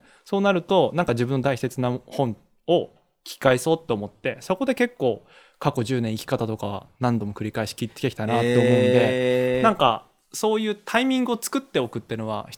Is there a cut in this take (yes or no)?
no